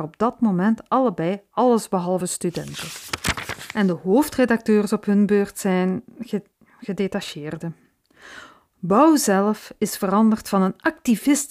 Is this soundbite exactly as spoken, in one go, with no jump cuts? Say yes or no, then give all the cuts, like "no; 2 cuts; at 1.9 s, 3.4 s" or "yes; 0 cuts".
yes; 0 cuts